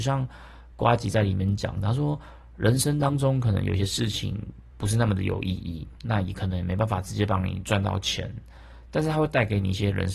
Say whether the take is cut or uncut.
cut